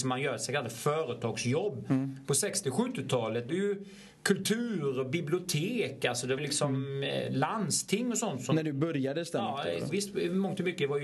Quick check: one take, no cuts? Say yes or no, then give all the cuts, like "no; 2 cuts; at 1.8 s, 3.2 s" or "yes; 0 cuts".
no; 3 cuts; at 3.5 s, 6.4 s, 9.9 s